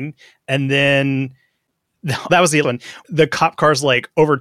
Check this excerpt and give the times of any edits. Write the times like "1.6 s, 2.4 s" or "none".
2.3 s, 2.6 s, 3.0 s